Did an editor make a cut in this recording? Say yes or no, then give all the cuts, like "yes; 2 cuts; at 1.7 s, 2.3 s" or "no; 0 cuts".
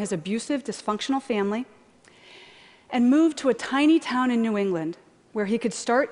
no; 0 cuts